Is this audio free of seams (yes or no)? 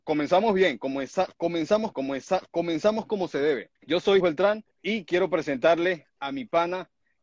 no